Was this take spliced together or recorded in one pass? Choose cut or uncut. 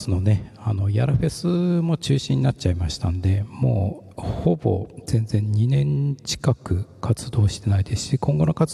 cut